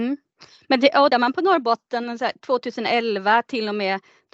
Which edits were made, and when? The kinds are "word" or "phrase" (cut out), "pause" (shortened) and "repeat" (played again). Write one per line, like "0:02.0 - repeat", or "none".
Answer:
0:01.1 - word